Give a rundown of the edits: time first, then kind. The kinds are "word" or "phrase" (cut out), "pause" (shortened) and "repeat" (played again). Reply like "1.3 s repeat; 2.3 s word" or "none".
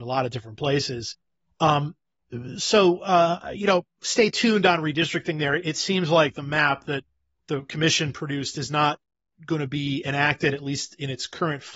none